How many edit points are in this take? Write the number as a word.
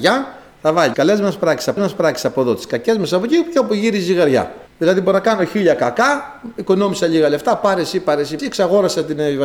four